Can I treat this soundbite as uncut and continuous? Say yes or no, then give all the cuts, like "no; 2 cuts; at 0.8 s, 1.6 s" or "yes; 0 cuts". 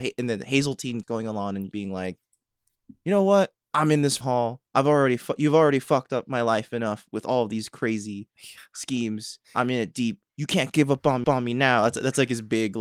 no; 8 cuts; at 1.0 s, 1.7 s, 3.6 s, 4.2 s, 4.7 s, 9.4 s, 10.3 s, 11.2 s